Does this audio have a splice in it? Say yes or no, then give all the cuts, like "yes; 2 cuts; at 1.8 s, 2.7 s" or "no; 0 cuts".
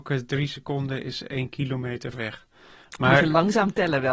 yes; 1 cut; at 2.1 s